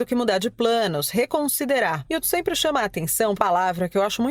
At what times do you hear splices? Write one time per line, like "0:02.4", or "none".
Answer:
0:02.2
0:03.4